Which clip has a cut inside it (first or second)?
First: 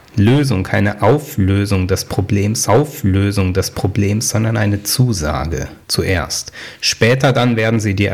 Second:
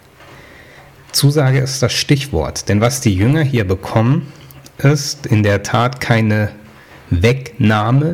first